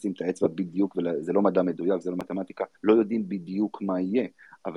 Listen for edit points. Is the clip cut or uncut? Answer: cut